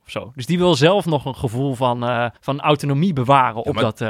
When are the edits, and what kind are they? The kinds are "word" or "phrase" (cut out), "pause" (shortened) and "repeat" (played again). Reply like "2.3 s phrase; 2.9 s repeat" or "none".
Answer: 2.4 s pause